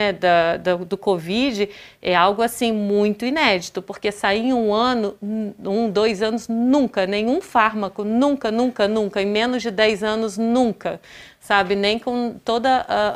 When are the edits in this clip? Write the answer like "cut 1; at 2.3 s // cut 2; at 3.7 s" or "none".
none